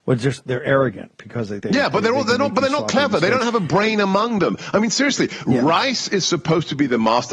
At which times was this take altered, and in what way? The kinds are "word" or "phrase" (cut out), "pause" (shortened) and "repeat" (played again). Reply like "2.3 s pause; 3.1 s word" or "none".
1.6 s word